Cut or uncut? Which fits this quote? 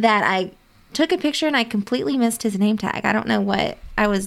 uncut